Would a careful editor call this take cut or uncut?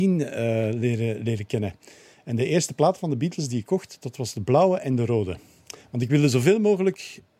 uncut